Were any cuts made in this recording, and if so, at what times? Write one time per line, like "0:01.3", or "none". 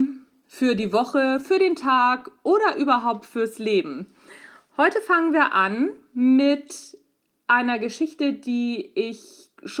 none